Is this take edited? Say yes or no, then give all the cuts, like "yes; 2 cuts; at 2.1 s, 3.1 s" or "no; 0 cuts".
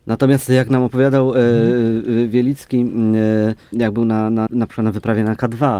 yes; 2 cuts; at 3.7 s, 4.5 s